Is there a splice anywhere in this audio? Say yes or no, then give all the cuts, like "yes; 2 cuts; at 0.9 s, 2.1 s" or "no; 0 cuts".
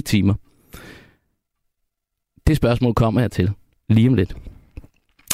no; 0 cuts